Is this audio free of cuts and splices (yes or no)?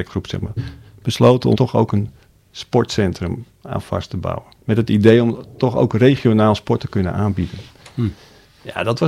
no